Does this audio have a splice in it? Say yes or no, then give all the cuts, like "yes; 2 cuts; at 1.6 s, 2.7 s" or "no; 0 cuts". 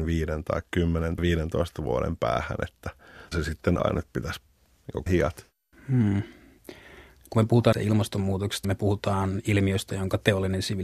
yes; 6 cuts; at 1.2 s, 3.3 s, 3.8 s, 5.1 s, 7.7 s, 8.6 s